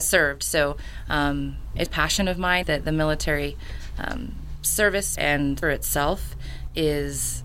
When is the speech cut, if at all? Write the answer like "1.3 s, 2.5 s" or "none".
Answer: 1.9 s, 2.6 s, 5.2 s, 5.6 s